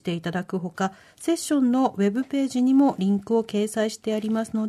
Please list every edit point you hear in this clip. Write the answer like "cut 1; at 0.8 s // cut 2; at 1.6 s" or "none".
none